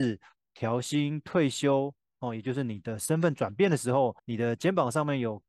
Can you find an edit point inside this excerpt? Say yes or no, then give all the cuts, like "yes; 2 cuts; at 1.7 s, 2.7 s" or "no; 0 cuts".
yes; 1 cut; at 4.2 s